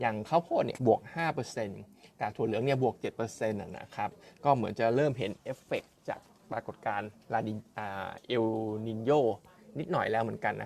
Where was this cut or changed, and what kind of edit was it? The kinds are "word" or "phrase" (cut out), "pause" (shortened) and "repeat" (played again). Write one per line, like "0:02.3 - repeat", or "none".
none